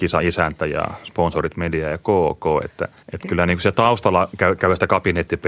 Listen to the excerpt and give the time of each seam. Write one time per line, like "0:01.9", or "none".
0:03.0